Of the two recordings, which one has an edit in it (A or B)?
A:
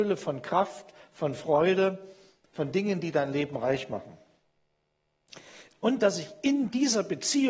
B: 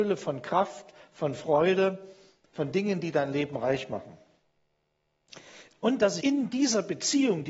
B